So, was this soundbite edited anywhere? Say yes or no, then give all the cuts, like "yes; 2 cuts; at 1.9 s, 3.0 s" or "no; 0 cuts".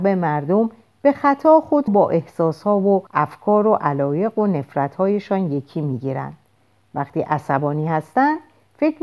yes; 2 cuts; at 1.9 s, 3.1 s